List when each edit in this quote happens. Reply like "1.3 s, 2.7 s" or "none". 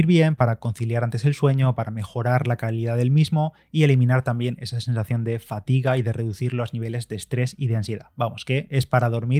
none